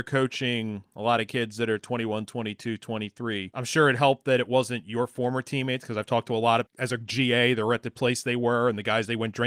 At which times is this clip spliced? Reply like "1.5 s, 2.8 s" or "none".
6.7 s